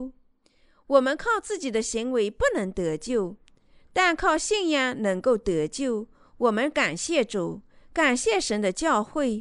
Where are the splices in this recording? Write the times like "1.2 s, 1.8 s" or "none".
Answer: none

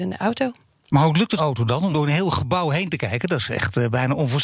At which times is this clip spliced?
1.4 s, 1.9 s

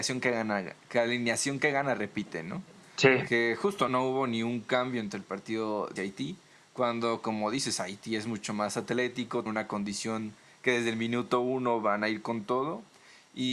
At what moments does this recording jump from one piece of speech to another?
3.9 s, 6.0 s, 9.5 s

